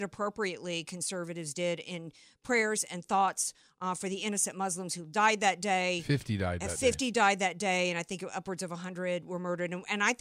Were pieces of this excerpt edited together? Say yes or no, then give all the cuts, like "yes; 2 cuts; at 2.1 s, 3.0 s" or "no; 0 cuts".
no; 0 cuts